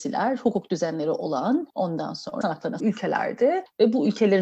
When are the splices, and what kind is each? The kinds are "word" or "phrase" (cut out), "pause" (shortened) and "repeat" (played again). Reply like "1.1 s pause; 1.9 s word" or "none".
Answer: 1.7 s pause; 2.4 s word; 2.8 s word